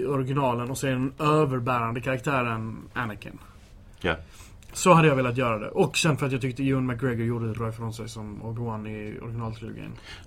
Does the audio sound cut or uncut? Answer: cut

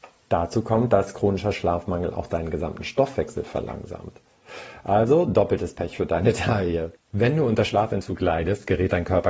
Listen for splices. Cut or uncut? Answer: uncut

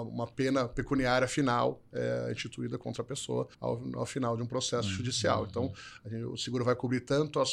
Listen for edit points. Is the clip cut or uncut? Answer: cut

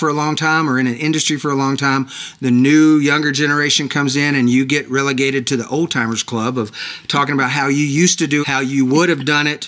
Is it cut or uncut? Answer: cut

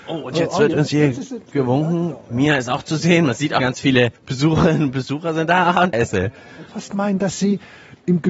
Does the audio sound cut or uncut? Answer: cut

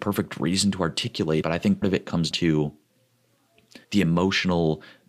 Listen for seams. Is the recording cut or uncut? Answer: cut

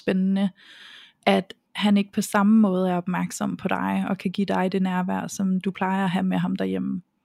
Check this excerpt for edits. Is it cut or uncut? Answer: uncut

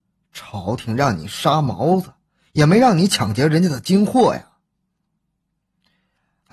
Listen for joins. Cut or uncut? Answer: uncut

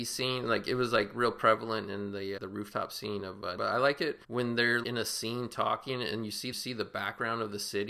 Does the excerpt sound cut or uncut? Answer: cut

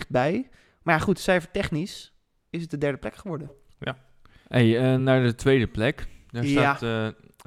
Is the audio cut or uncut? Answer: uncut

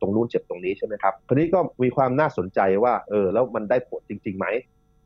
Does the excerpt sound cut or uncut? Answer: cut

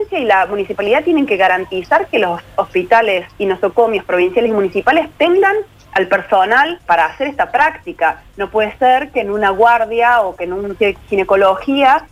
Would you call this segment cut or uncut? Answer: cut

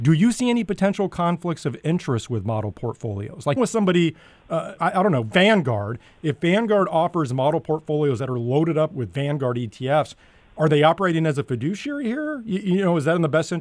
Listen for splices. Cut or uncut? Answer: cut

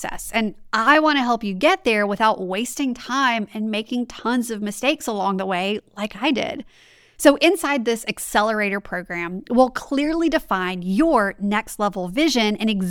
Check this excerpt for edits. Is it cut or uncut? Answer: uncut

